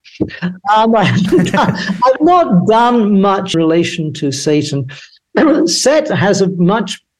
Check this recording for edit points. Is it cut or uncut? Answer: cut